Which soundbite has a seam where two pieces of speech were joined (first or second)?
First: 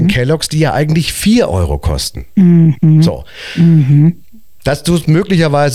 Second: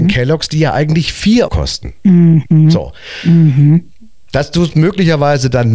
second